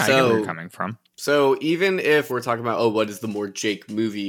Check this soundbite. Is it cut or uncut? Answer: cut